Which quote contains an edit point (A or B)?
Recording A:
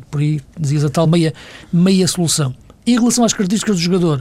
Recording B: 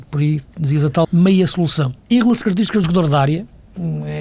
B